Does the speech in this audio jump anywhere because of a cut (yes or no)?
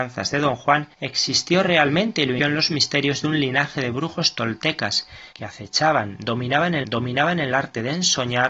yes